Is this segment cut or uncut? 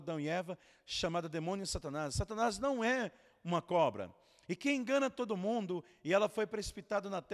uncut